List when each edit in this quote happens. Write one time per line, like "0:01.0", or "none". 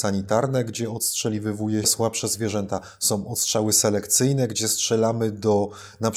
0:01.8